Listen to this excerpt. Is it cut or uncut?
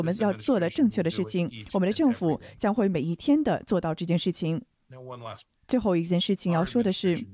cut